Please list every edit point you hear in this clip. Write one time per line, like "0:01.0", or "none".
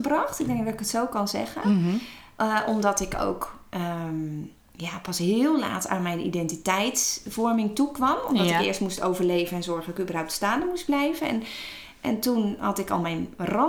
none